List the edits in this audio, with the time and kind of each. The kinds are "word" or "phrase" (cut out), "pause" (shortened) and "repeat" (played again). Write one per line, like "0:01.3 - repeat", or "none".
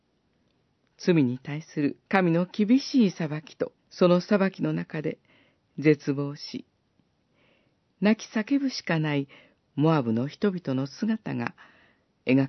0:02.1 - pause
0:03.8 - pause